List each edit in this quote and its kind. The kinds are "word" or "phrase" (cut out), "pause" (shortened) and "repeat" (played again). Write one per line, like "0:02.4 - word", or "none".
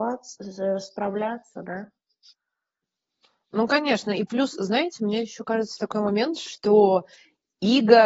none